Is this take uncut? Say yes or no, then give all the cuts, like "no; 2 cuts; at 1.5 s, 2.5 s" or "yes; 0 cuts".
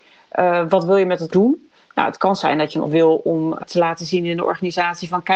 no; 3 cuts; at 1.3 s, 2.8 s, 3.6 s